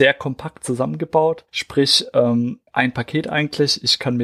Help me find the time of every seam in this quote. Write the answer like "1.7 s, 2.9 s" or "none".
1.5 s, 2.7 s